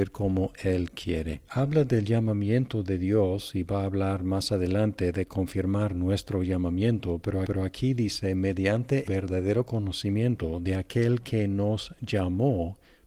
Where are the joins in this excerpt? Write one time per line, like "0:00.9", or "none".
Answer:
0:01.5
0:07.4
0:09.1